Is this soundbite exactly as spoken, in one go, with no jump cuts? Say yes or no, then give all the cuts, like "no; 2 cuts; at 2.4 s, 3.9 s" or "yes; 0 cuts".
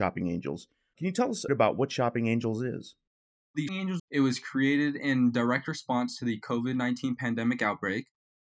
no; 3 cuts; at 1.5 s, 3.7 s, 4.0 s